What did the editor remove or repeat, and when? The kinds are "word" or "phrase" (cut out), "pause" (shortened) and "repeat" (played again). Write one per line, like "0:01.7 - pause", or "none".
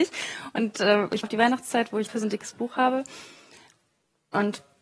0:01.2 - word
0:02.1 - word